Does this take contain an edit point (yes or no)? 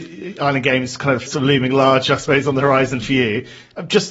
yes